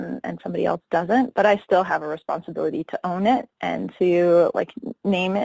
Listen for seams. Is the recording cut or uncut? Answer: uncut